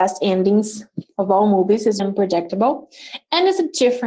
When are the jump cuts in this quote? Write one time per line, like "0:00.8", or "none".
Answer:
0:02.0